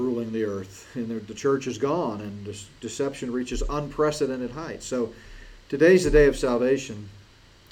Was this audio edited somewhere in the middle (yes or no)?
no